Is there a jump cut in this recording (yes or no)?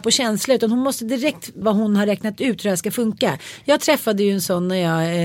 yes